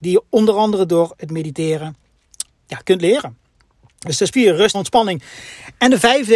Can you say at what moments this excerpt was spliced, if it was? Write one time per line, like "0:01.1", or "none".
0:02.5
0:04.3
0:04.7